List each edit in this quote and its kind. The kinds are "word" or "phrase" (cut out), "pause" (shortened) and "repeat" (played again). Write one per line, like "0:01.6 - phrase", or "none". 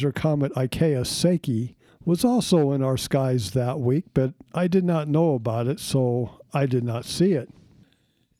0:01.9 - pause